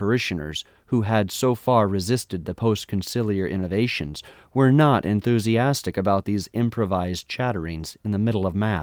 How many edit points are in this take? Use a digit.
0